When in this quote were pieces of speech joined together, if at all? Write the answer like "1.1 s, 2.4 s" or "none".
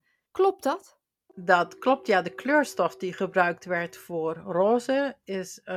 none